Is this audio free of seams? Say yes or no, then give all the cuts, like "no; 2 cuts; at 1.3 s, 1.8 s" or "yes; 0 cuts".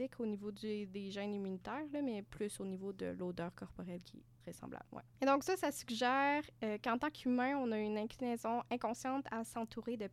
no; 2 cuts; at 4.4 s, 5.1 s